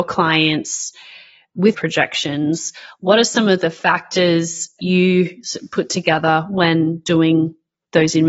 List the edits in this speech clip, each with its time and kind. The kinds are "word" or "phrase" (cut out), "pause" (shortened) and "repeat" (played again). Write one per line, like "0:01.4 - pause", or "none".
0:01.7 - word
0:04.8 - word